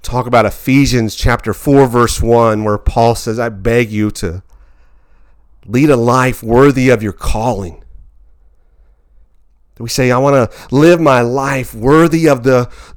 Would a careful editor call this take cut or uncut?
uncut